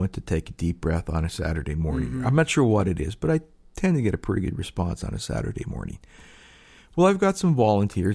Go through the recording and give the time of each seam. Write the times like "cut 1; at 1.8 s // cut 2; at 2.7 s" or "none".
none